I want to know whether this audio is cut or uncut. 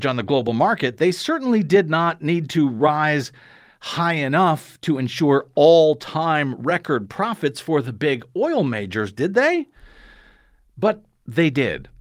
uncut